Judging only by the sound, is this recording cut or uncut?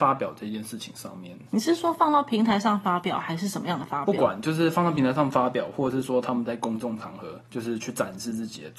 cut